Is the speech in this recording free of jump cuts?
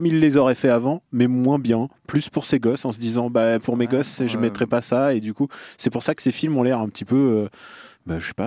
yes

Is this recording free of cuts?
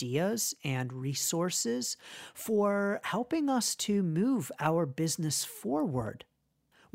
yes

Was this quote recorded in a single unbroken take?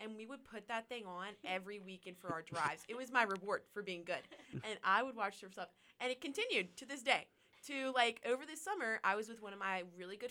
yes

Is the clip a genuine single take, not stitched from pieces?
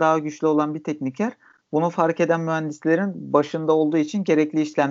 yes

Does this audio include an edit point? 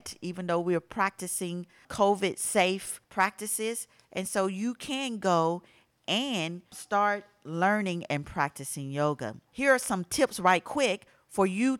yes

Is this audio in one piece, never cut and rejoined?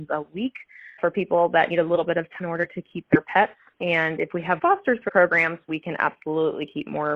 no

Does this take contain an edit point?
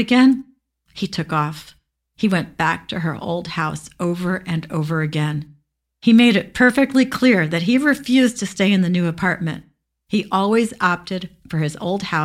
no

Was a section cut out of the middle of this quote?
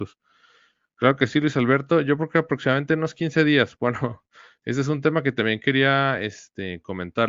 no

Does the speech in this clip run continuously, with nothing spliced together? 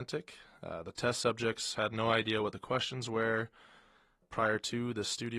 yes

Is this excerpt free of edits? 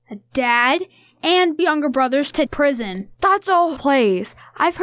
no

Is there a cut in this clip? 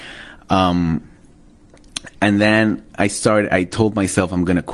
no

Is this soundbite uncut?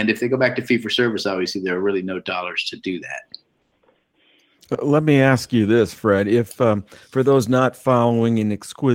yes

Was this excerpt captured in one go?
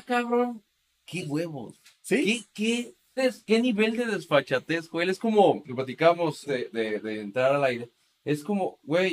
no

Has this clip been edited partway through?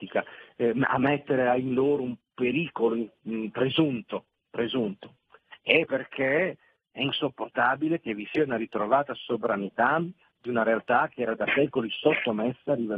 no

